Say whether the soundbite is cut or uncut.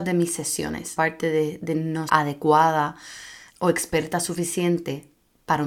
cut